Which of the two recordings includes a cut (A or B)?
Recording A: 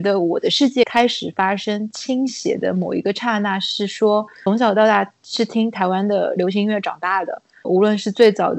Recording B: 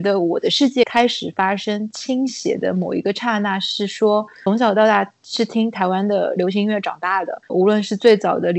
B